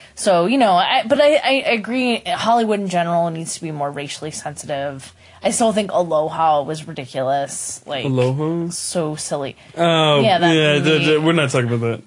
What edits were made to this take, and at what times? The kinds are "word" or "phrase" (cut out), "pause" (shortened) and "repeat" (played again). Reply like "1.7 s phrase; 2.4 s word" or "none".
none